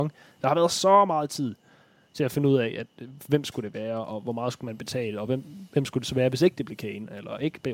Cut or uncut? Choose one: uncut